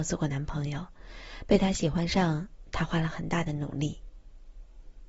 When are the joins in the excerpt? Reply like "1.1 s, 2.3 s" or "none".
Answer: 2.7 s